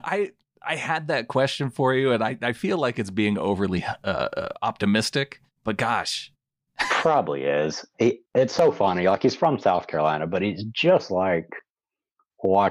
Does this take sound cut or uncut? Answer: cut